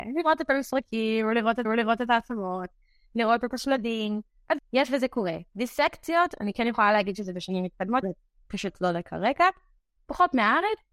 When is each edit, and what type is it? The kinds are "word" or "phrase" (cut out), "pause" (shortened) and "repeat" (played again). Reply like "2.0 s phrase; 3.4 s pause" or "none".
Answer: 1.6 s repeat; 4.6 s word; 5.5 s pause; 8.0 s word; 10.0 s word